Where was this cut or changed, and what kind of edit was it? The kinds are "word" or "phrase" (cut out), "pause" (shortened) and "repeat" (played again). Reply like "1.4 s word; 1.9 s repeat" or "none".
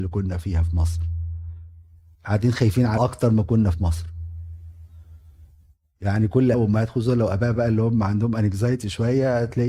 3.0 s word; 6.5 s word